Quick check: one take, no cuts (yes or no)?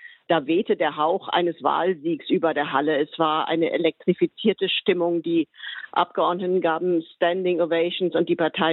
yes